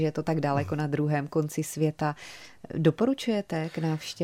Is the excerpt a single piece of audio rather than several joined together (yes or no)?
yes